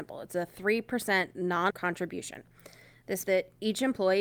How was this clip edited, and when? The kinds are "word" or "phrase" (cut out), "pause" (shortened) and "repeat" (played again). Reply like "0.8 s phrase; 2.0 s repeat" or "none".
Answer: 1.7 s word; 3.2 s word